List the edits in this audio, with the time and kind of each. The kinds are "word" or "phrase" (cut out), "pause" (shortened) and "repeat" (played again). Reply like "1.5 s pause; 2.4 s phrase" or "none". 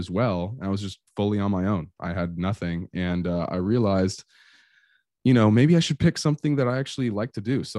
none